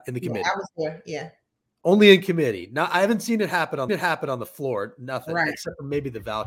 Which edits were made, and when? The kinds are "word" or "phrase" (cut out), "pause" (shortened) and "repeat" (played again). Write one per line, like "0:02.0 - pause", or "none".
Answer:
0:03.9 - repeat